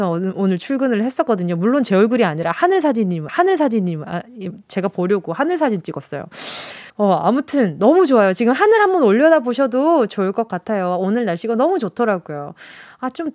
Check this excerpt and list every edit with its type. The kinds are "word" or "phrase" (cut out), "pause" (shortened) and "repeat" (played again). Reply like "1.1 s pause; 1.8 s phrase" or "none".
3.3 s repeat; 6.9 s pause